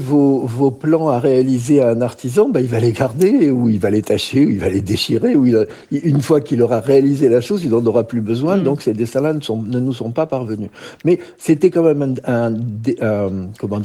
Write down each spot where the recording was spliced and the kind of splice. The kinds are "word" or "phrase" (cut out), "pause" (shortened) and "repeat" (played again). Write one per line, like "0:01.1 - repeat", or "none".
none